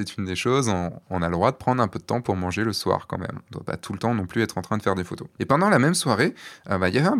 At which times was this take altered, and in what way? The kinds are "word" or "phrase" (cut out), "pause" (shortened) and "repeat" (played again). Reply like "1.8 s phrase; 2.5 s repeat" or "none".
none

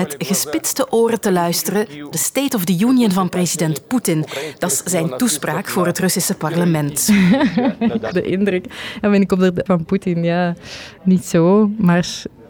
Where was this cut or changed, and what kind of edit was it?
2.1 s word; 8.1 s word; 9.7 s phrase

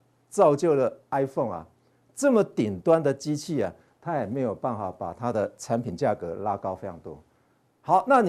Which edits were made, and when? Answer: none

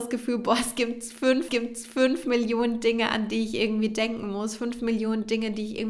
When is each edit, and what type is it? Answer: 1.5 s repeat

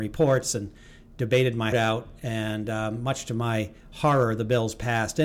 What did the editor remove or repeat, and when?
1.7 s word

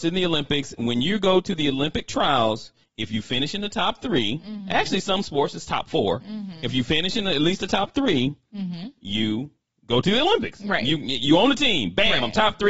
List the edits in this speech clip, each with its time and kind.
none

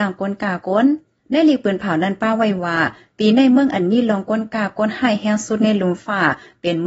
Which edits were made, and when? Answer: none

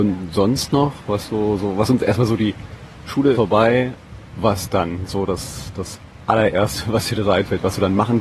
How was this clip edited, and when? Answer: 3.3 s word

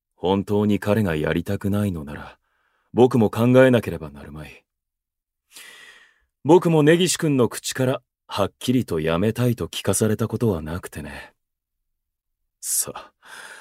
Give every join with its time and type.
none

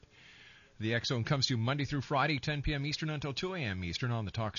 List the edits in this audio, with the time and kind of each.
none

